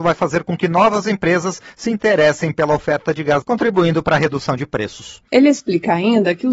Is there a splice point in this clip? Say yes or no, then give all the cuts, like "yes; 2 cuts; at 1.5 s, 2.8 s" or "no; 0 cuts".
yes; 1 cut; at 3.4 s